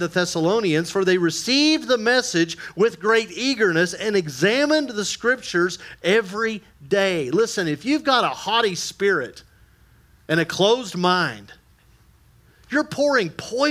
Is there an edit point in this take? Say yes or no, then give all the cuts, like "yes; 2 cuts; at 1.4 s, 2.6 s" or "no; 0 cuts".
no; 0 cuts